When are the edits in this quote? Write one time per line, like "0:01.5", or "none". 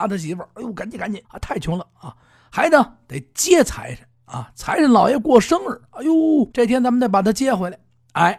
0:01.2
0:06.5